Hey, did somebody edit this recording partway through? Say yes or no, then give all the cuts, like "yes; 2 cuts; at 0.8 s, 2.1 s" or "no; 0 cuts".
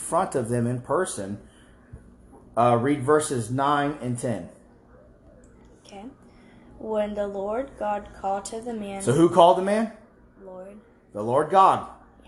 no; 0 cuts